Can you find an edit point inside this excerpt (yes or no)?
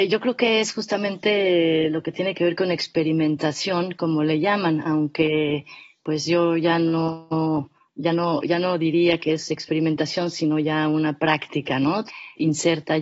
no